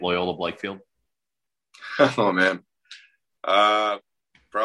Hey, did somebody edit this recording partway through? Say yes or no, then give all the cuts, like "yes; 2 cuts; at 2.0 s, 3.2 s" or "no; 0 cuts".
no; 0 cuts